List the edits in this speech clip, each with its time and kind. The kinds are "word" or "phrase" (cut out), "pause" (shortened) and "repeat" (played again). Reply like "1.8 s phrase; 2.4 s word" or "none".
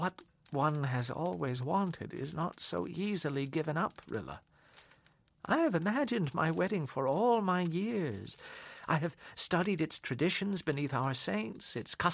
none